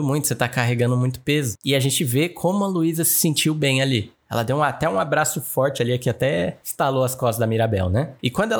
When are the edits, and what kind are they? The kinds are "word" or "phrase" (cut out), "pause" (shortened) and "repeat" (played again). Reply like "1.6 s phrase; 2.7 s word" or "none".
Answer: none